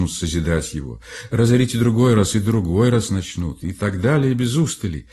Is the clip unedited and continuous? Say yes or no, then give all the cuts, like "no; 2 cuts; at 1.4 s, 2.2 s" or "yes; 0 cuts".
yes; 0 cuts